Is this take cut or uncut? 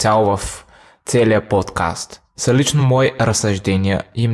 uncut